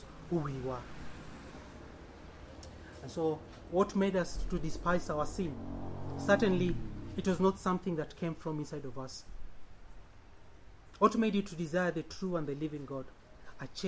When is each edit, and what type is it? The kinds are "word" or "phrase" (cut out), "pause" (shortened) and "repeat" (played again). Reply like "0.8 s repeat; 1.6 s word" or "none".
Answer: none